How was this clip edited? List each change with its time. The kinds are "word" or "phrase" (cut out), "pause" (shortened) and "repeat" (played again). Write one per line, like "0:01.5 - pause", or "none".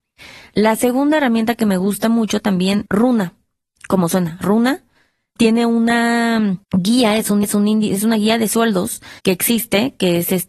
0:02.9 - word
0:05.4 - word
0:06.6 - pause
0:07.4 - repeat
0:09.2 - pause